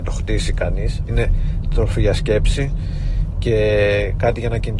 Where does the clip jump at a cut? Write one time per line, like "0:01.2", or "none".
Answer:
0:01.1